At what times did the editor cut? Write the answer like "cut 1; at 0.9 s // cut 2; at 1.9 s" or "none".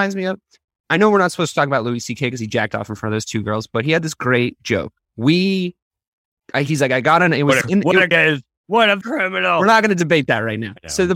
cut 1; at 5.0 s // cut 2; at 7.6 s // cut 3; at 8.1 s // cut 4; at 9.0 s